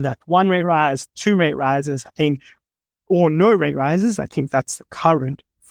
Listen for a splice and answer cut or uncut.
uncut